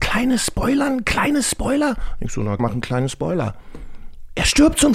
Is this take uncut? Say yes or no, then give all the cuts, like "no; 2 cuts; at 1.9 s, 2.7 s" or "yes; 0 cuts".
no; 1 cut; at 2.6 s